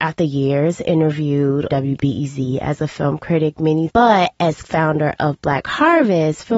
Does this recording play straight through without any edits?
no; 3 cuts; at 1.7 s, 3.9 s, 4.6 s

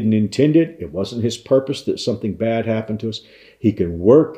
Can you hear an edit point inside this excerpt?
no; 0 cuts

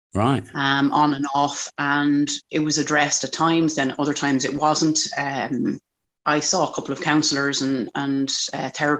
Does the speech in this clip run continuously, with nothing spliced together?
yes; 0 cuts

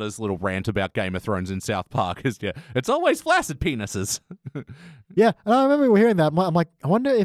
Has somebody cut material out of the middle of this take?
no; 0 cuts

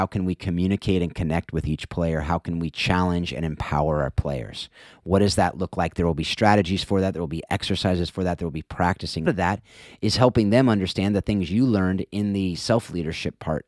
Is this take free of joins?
no; 1 cut; at 9.3 s

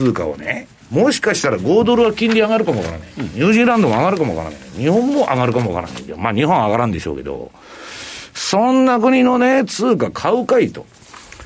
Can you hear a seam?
no; 0 cuts

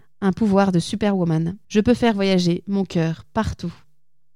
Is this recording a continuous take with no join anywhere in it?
no; 1 cut; at 1.6 s

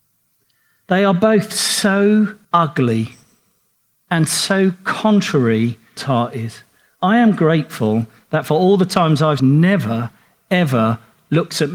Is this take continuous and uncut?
no; 3 cuts; at 2.4 s, 6.0 s, 9.4 s

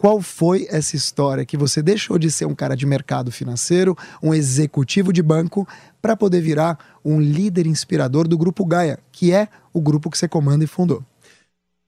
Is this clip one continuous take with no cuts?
yes; 0 cuts

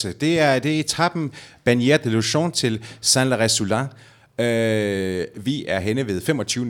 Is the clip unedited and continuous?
yes; 0 cuts

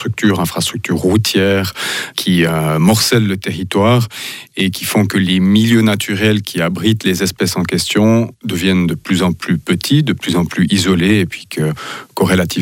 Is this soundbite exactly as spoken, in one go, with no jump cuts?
yes; 0 cuts

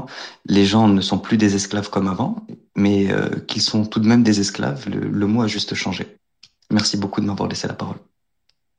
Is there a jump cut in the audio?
no; 0 cuts

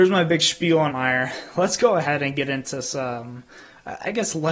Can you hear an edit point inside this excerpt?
yes; 1 cut; at 0.9 s

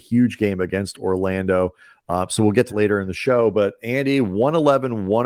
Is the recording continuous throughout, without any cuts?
no; 1 cut; at 2.7 s

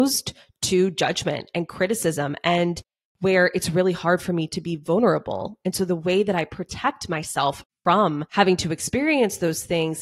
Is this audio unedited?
yes; 0 cuts

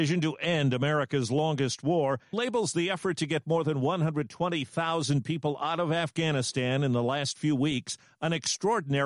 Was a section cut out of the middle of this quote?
yes; 1 cut; at 2.3 s

